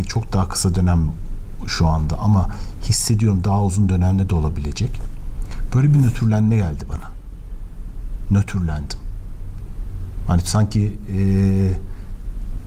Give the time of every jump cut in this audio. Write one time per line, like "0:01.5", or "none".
none